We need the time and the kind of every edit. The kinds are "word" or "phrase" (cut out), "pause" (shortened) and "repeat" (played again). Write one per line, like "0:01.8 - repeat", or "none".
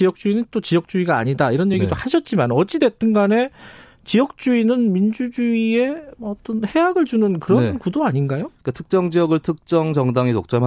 none